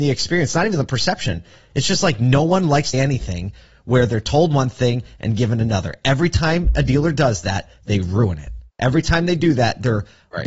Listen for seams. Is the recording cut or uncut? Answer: cut